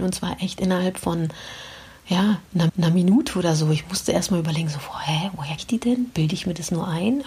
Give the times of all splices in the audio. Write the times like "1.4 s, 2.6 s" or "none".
2.7 s, 5.6 s